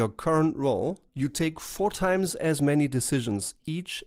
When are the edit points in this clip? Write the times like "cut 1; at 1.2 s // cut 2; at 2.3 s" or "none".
cut 1; at 1.1 s